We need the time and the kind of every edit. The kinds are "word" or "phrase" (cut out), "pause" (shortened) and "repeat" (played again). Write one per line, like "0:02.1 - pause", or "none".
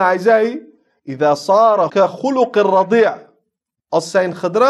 0:01.9 - word